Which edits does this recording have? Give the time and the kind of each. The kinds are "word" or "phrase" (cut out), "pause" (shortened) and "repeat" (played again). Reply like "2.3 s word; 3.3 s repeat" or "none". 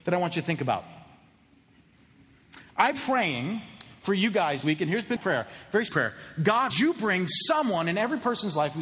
2.9 s word; 4.6 s word; 5.2 s word; 5.9 s word; 6.7 s word